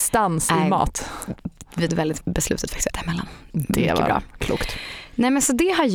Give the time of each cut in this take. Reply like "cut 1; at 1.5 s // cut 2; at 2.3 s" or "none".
cut 1; at 1.9 s // cut 2; at 2.2 s // cut 3; at 2.9 s